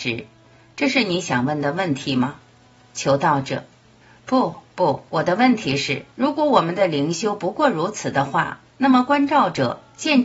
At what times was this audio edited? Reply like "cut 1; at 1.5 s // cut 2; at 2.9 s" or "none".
cut 1; at 2.5 s // cut 2; at 4.0 s // cut 3; at 5.1 s // cut 4; at 6.1 s

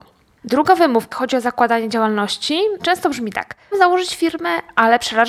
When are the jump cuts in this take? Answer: cut 1; at 1.1 s // cut 2; at 2.8 s // cut 3; at 3.7 s

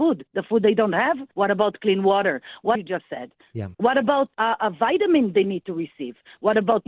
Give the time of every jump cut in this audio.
cut 1; at 1.3 s // cut 2; at 2.7 s // cut 3; at 3.7 s // cut 4; at 4.3 s

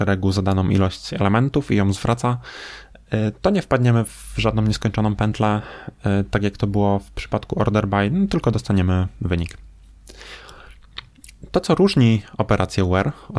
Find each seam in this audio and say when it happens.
none

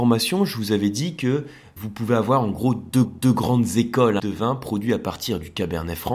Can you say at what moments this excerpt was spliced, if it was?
cut 1; at 1.8 s // cut 2; at 3.0 s // cut 3; at 4.2 s

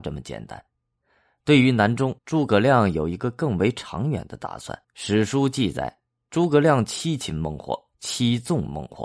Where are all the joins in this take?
cut 1; at 2.2 s // cut 2; at 4.8 s

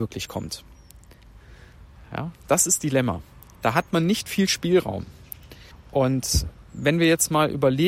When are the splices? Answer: cut 1; at 2.8 s // cut 2; at 5.7 s

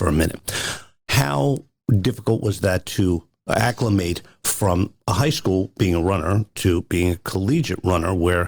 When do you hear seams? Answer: none

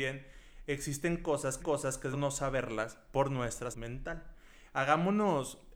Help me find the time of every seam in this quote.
cut 1; at 1.6 s // cut 2; at 2.1 s // cut 3; at 3.7 s

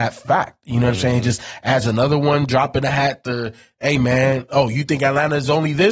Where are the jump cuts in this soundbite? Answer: none

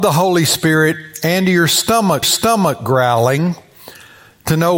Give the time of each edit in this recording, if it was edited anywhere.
cut 1; at 2.2 s

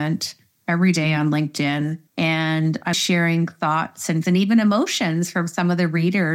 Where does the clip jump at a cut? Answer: cut 1; at 2.1 s // cut 2; at 2.9 s // cut 3; at 4.2 s

